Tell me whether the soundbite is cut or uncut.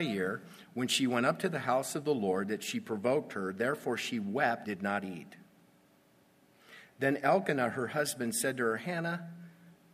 cut